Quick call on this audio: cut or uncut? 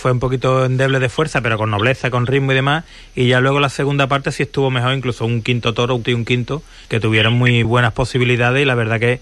cut